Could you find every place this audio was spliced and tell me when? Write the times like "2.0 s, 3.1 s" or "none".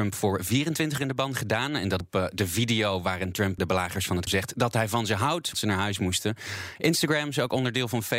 1.0 s, 2.0 s, 3.6 s, 4.3 s, 5.5 s